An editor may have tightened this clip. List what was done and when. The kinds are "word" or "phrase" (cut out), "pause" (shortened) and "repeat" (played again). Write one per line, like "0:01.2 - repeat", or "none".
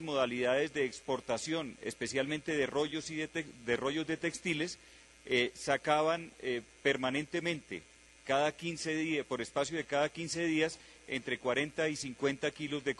none